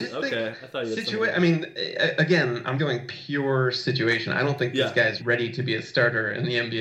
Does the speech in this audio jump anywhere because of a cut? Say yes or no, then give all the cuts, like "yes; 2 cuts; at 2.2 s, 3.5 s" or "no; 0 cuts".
yes; 2 cuts; at 2.8 s, 5.2 s